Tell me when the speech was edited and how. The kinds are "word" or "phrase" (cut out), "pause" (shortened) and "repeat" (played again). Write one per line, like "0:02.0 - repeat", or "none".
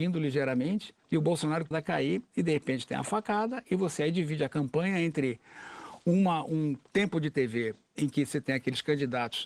0:01.0 - pause
0:01.7 - phrase